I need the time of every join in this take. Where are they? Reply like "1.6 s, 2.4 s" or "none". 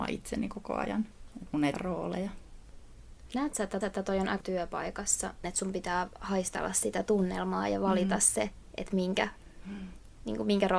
1.7 s, 3.8 s, 4.4 s